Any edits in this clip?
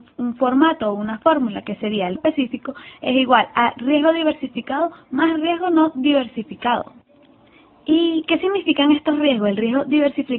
yes; 1 cut; at 2.2 s

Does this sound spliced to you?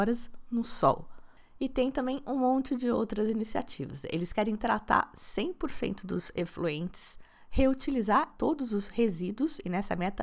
yes; 1 cut; at 8.3 s

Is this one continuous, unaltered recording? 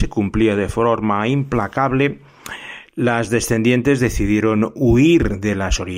no; 1 cut; at 2.9 s

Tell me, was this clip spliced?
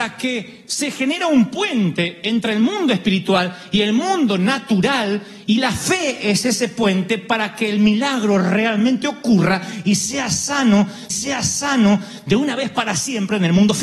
yes; 1 cut; at 11.1 s

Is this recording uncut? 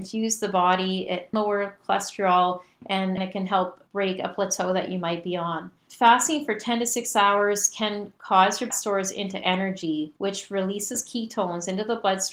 no; 6 cuts; at 1.3 s, 3.2 s, 3.9 s, 8.2 s, 8.7 s, 10.2 s

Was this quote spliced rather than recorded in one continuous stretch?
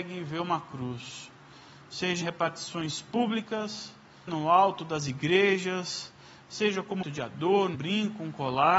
yes; 4 cuts; at 2.2 s, 4.3 s, 7.0 s, 7.7 s

